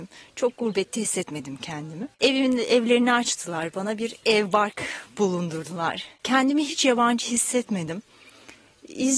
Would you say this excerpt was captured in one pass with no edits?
no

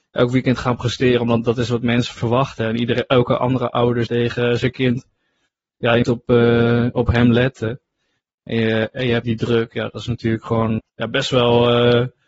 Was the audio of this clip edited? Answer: yes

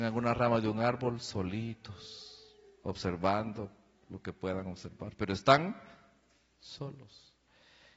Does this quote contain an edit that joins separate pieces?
no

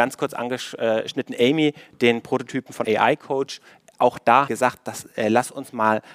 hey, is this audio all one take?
no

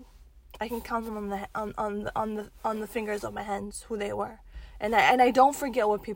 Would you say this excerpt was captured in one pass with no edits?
yes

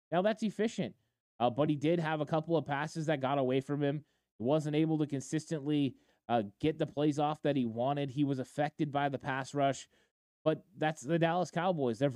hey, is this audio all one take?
yes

